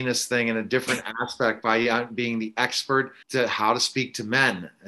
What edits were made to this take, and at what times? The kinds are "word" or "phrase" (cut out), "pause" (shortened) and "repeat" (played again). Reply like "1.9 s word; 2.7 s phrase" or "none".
3.2 s pause

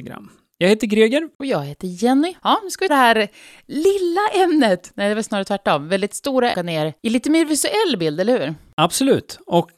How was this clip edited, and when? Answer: 1.3 s pause; 2.4 s pause; 2.9 s word; 6.5 s phrase; 7.0 s pause

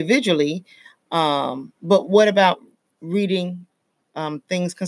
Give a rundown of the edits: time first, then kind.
1.8 s pause

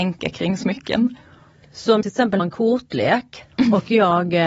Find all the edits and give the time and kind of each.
2.0 s word; 2.4 s word

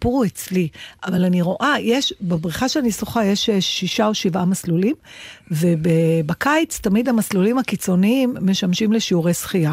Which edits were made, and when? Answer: none

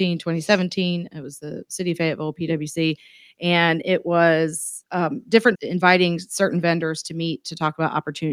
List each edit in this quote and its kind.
4.8 s pause; 5.5 s word

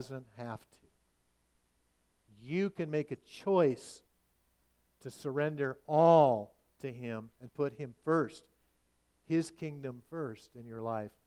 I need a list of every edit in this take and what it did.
none

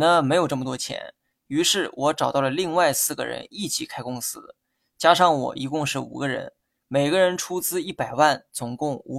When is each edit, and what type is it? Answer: none

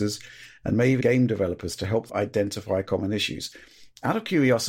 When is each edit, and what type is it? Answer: 1.0 s word; 2.1 s word

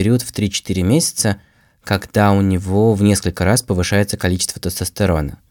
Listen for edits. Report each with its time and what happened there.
none

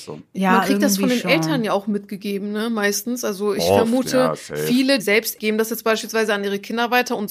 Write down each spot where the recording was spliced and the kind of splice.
5.0 s word; 5.4 s phrase

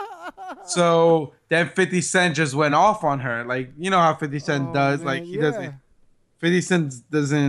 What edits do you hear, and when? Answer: none

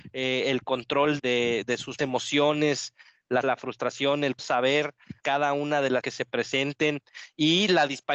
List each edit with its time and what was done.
1.2 s word; 2.0 s word; 3.4 s word; 4.4 s word; 5.2 s word; 6.0 s word

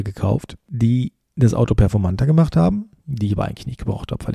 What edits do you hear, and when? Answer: 3.0 s pause

